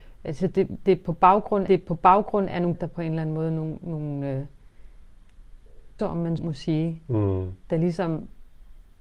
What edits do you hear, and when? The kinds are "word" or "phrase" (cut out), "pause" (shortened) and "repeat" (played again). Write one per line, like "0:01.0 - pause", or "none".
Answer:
0:01.7 - repeat
0:02.7 - word
0:03.8 - word
0:06.0 - word
0:06.4 - word